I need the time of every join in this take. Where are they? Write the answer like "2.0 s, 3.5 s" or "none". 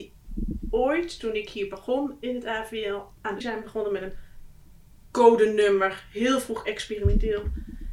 3.4 s